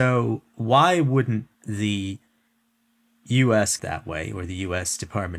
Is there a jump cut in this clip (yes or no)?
yes